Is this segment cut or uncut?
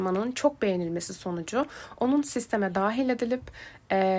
uncut